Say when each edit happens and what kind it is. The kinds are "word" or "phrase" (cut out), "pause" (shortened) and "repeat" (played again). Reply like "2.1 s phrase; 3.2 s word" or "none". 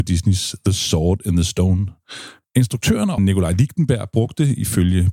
3.2 s word